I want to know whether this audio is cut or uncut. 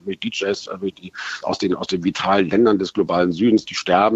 cut